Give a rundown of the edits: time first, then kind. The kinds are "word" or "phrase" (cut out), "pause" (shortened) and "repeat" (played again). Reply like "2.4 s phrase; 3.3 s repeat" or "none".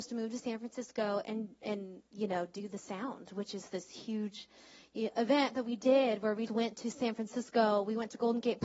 6.5 s word